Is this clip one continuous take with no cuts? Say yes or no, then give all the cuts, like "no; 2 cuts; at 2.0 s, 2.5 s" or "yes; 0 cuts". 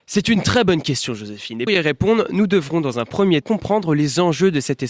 no; 2 cuts; at 1.7 s, 3.4 s